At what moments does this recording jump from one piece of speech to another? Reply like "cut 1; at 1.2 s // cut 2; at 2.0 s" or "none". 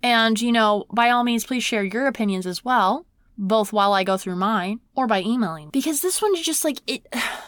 cut 1; at 3.2 s // cut 2; at 4.9 s // cut 3; at 5.7 s